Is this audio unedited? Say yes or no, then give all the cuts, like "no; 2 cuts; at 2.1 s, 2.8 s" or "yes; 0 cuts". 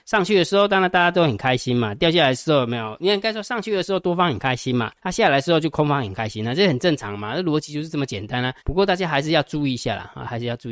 no; 2 cuts; at 5.0 s, 8.6 s